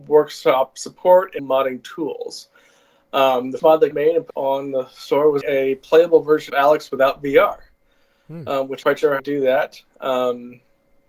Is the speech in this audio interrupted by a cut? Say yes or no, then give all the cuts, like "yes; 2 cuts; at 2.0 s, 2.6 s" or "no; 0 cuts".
yes; 8 cuts; at 1.4 s, 3.6 s, 3.9 s, 4.3 s, 5.4 s, 6.5 s, 8.8 s, 9.2 s